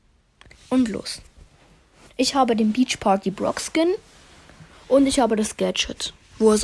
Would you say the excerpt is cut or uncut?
uncut